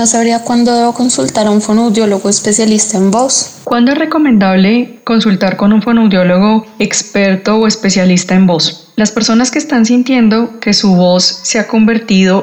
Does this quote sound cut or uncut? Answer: uncut